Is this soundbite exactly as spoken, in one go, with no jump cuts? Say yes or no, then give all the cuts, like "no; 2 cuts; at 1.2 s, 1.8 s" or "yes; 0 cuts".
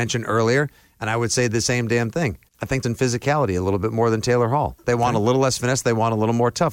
no; 2 cuts; at 2.5 s, 2.8 s